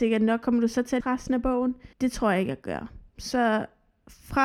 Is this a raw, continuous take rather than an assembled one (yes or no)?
no